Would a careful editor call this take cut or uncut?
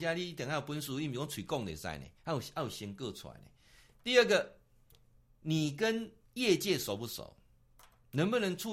cut